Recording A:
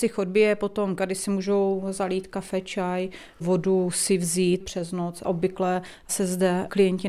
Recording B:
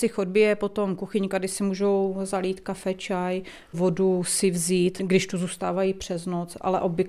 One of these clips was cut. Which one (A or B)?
A